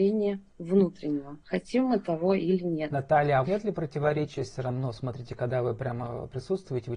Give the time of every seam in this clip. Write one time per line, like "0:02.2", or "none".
0:03.4